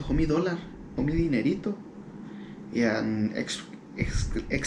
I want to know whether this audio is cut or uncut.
cut